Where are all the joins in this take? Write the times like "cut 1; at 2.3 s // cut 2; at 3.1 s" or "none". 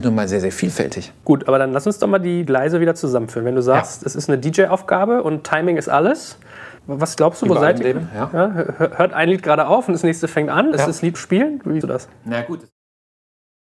cut 1; at 6.8 s // cut 2; at 10.7 s // cut 3; at 11.1 s // cut 4; at 11.8 s